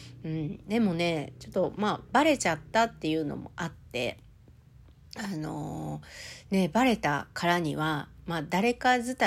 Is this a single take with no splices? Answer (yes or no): yes